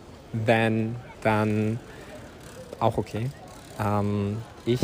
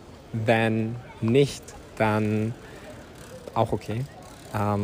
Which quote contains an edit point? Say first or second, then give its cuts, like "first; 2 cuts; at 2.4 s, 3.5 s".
first; 1 cut; at 1.1 s